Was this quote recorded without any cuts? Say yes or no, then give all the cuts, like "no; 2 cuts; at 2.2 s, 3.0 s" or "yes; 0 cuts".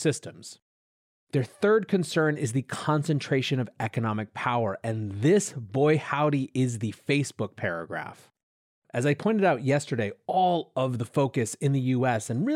yes; 0 cuts